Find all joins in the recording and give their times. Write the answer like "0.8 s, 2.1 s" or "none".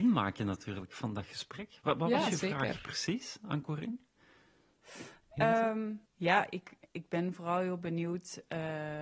6.1 s

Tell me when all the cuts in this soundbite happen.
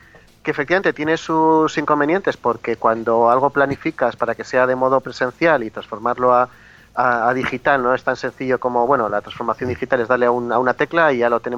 none

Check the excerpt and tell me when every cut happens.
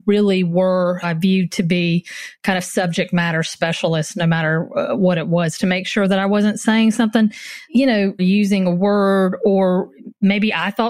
1.0 s, 7.7 s, 8.2 s

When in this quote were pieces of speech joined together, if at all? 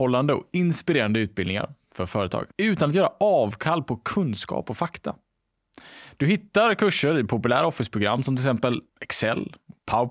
2.5 s, 8.9 s

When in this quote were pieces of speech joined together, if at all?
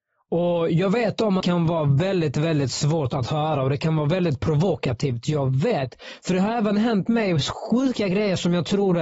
1.4 s

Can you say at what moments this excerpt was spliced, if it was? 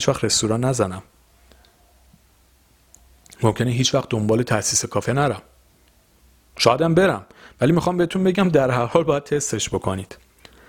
none

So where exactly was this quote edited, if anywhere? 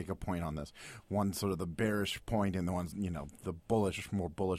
2.9 s

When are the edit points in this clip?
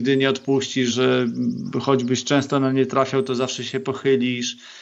0.9 s

